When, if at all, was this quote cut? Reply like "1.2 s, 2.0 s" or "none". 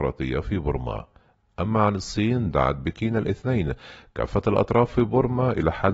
none